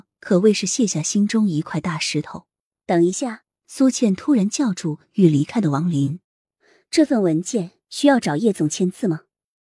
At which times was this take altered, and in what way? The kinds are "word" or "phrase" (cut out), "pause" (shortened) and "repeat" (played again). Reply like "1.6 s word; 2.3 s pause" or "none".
2.7 s pause; 3.5 s pause; 6.2 s pause